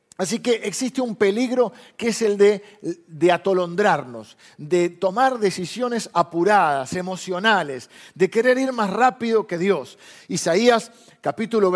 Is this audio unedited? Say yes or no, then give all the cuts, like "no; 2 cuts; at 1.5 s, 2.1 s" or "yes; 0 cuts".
yes; 0 cuts